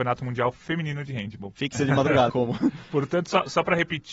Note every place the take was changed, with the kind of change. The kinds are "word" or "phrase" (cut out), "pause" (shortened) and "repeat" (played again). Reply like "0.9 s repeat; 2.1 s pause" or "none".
1.7 s phrase; 2.3 s phrase